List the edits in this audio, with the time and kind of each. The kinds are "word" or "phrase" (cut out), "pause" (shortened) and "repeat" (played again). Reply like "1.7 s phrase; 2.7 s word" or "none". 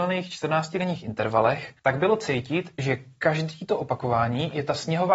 1.8 s pause